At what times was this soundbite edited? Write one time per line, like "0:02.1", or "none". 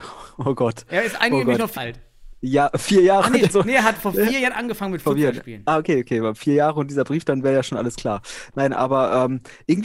0:01.8
0:03.5